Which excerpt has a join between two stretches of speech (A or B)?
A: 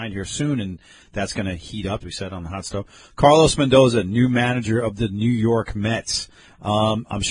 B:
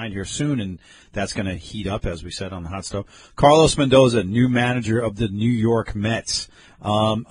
A